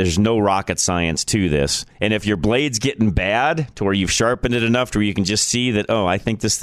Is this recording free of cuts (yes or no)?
no